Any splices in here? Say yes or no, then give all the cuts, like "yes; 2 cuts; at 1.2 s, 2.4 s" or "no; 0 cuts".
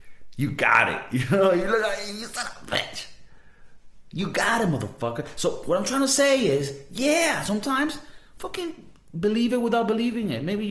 no; 0 cuts